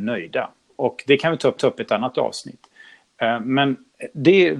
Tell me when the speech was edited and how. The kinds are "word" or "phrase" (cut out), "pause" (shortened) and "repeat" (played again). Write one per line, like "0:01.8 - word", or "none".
0:01.6 - repeat